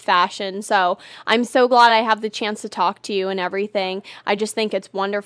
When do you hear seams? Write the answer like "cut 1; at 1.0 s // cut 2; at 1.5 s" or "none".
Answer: none